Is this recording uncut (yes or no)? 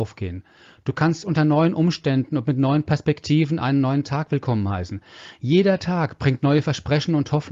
yes